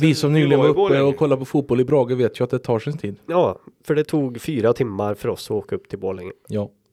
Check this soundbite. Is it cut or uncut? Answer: uncut